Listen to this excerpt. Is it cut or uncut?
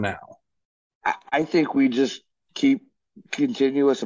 uncut